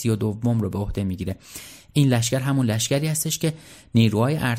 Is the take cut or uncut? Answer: uncut